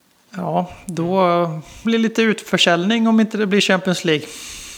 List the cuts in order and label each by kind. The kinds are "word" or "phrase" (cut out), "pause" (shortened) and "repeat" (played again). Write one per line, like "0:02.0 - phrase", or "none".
0:01.8 - phrase